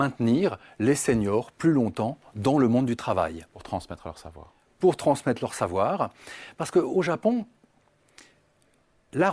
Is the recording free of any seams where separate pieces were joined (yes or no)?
yes